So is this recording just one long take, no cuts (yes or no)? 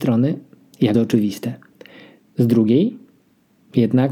no